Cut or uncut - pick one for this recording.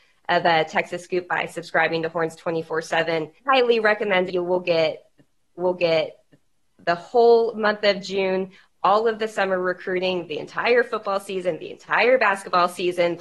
cut